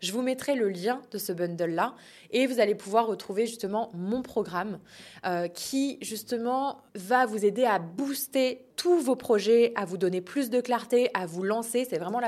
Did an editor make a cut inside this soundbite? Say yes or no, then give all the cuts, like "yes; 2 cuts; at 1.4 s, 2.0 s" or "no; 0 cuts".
yes; 2 cuts; at 6.9 s, 8.7 s